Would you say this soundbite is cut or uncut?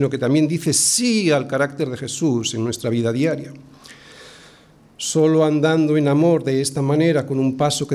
uncut